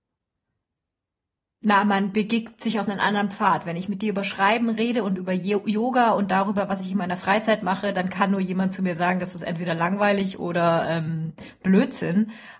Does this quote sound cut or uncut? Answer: uncut